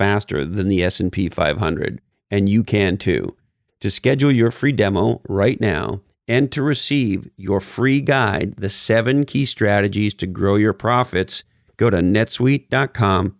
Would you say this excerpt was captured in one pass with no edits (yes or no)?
yes